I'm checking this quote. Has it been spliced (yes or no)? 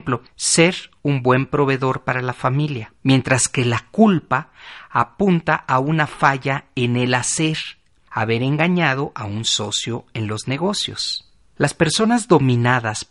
yes